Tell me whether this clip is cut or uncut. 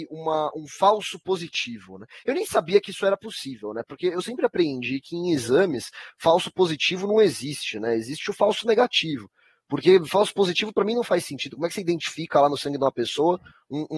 uncut